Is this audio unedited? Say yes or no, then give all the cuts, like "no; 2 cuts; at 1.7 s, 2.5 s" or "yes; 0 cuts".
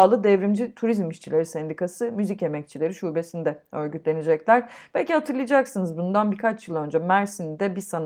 yes; 0 cuts